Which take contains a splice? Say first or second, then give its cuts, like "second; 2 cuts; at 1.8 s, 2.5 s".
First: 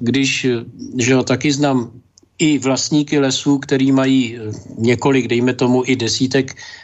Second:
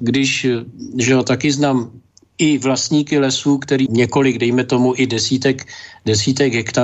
second; 1 cut; at 3.9 s